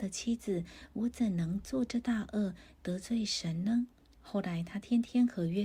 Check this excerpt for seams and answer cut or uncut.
cut